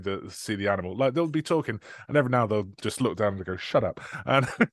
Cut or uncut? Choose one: uncut